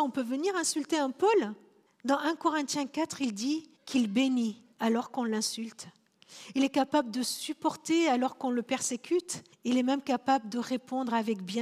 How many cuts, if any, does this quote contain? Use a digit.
4